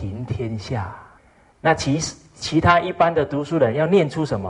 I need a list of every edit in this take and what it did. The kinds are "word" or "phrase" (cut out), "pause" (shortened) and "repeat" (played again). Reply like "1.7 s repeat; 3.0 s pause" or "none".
1.2 s pause